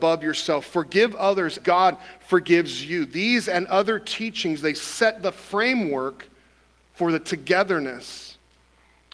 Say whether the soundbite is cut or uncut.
cut